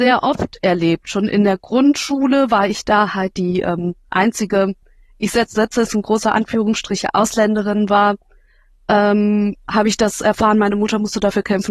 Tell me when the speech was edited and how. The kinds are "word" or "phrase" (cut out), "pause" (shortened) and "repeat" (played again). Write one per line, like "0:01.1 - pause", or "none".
none